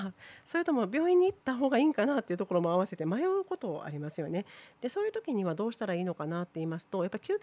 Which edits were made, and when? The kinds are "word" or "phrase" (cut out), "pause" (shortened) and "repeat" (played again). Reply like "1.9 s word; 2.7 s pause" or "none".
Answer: 1.4 s pause